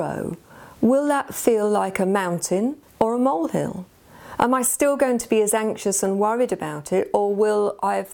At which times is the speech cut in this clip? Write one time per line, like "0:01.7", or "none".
0:02.8